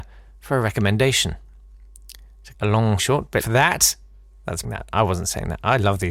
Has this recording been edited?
yes; 4 cuts; at 2.5 s, 3.0 s, 3.4 s, 4.6 s

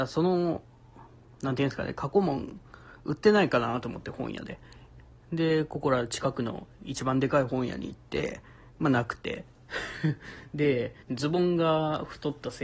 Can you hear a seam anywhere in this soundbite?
yes; 1 cut; at 11.0 s

